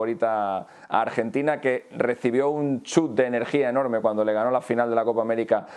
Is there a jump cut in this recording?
no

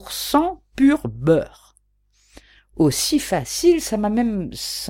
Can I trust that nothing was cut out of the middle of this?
yes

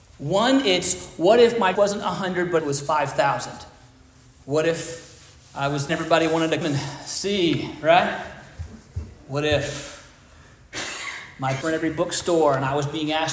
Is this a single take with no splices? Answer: no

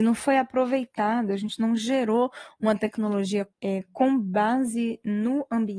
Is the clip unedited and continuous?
no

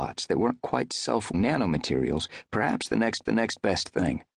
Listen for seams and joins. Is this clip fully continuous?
no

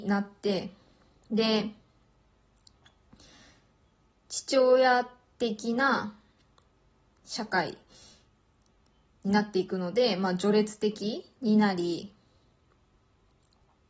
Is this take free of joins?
yes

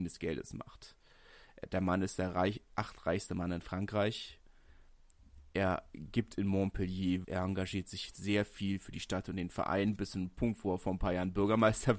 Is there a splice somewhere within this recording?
yes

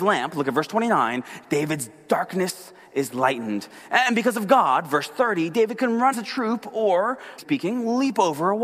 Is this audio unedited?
no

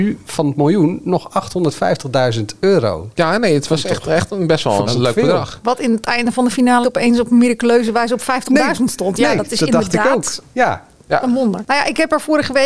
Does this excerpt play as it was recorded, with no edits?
no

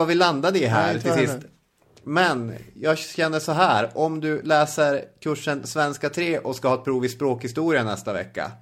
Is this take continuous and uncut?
yes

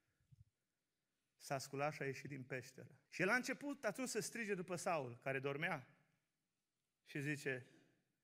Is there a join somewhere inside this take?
yes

